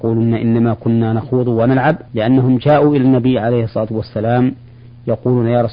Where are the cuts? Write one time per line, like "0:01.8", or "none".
0:02.1

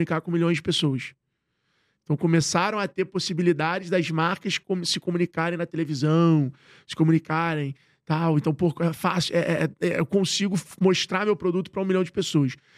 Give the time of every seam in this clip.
none

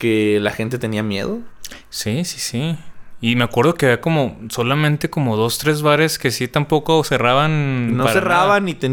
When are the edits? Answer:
none

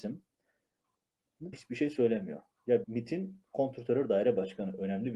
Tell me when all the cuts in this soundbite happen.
0:01.5
0:02.8

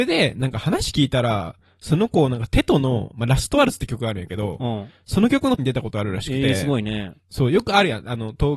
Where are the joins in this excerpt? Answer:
0:05.6

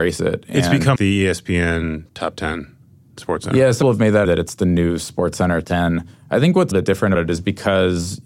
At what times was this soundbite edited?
0:01.0
0:03.8
0:04.2
0:05.6
0:06.7
0:07.1

